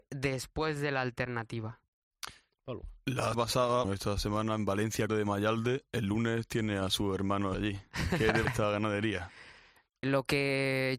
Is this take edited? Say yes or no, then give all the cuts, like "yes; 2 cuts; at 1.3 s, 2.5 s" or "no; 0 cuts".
yes; 6 cuts; at 3.3 s, 3.8 s, 5.1 s, 7.5 s, 8.4 s, 10.0 s